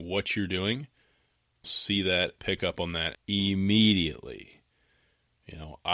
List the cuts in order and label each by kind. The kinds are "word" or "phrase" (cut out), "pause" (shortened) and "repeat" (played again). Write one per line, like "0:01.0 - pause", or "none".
0:01.6 - phrase
0:02.4 - word
0:03.1 - phrase